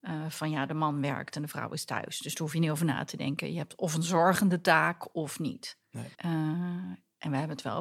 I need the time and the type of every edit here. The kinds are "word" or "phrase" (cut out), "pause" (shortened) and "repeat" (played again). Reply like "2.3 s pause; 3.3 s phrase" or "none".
6.1 s pause